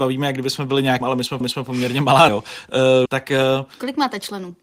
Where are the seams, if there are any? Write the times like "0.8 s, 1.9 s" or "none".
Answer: 1.0 s, 1.4 s, 2.3 s, 3.1 s